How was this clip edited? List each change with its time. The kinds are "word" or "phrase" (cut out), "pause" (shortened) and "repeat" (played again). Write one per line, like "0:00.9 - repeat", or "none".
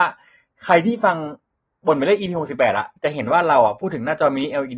0:03.0 - pause